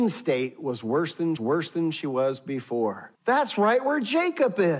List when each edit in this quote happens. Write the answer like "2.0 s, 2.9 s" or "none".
1.4 s, 3.1 s